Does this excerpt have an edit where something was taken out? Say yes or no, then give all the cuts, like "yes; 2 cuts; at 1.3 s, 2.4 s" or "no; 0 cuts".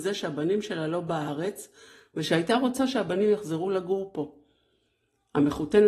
no; 0 cuts